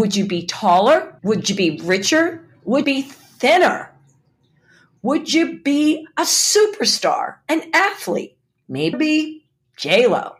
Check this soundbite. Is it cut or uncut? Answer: cut